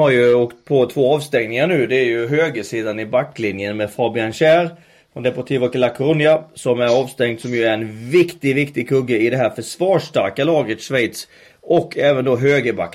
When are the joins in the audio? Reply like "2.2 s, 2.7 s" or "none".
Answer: none